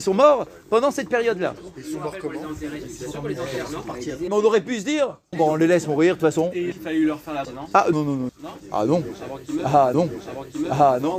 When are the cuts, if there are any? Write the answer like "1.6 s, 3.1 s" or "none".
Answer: 4.3 s, 5.3 s, 6.7 s, 7.4 s, 7.9 s, 8.3 s, 9.9 s